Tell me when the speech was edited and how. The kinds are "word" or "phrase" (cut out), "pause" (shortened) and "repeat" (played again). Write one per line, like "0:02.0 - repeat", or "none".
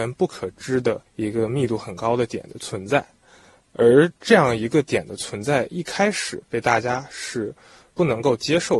0:01.1 - pause

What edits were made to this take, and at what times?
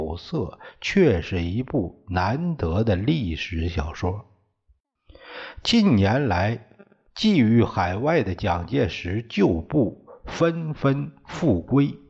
none

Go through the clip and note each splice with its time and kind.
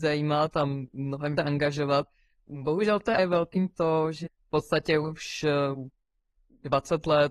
0:01.4 - word
0:03.2 - word
0:03.7 - word
0:04.3 - word

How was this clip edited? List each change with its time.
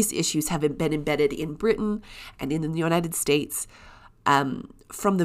none

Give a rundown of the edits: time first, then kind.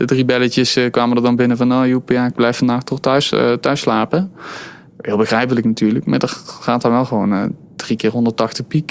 none

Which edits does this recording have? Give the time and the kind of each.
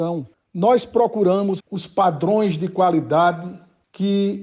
0:01.6 - word

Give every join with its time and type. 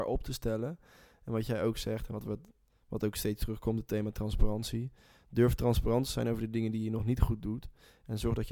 none

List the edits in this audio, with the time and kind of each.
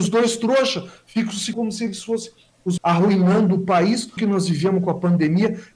0:01.5 - word
0:02.8 - word
0:04.2 - word

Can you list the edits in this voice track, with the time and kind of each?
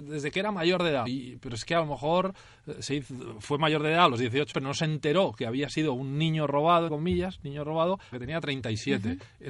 0:01.1 - word
0:04.5 - word
0:06.9 - word
0:08.1 - word

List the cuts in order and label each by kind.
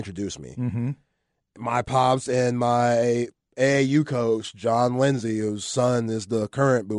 none

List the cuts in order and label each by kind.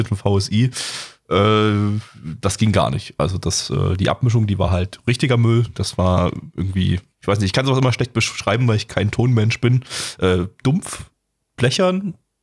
none

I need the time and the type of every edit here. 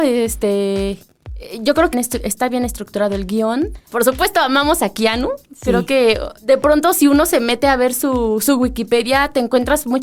0:01.9 - phrase

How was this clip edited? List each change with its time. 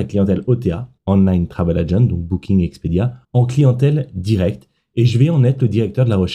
0:01.0 - pause
0:03.2 - pause

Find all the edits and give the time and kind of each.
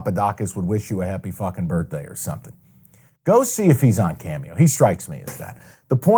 none

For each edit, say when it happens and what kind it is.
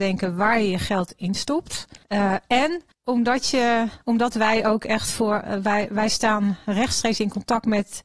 0:02.0 - pause
0:02.9 - pause

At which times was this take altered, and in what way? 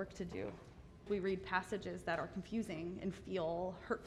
0:01.1 - word

